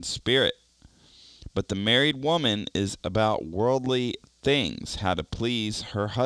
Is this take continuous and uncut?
no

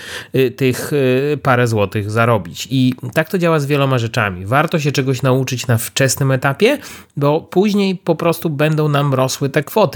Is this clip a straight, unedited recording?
yes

